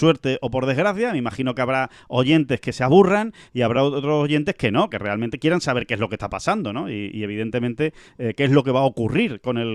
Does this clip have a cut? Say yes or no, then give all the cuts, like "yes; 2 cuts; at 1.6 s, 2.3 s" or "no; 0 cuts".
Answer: no; 0 cuts